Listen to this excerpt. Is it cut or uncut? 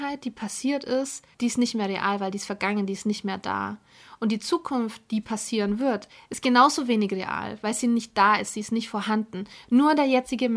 cut